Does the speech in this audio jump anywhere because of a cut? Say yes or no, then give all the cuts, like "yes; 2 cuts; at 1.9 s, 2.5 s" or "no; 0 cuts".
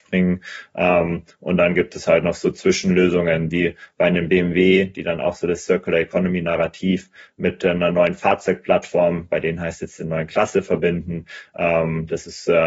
no; 0 cuts